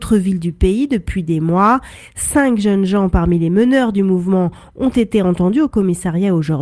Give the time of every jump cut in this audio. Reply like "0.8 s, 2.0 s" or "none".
none